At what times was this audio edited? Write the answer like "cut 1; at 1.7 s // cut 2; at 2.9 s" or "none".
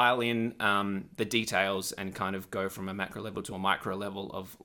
none